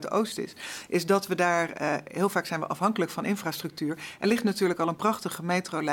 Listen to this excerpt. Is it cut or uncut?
cut